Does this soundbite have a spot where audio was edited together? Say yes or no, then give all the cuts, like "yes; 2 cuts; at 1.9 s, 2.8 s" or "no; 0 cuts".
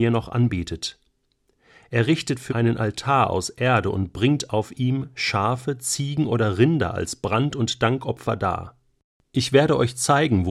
yes; 1 cut; at 2.5 s